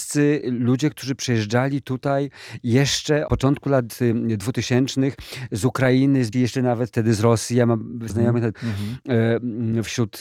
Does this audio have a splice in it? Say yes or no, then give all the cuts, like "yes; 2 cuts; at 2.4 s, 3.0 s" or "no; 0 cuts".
yes; 4 cuts; at 3.3 s, 6.3 s, 8.1 s, 8.5 s